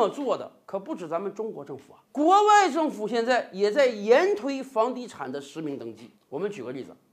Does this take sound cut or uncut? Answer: cut